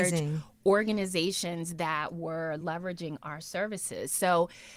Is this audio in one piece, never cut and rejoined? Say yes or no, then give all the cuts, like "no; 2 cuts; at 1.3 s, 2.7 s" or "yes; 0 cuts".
yes; 0 cuts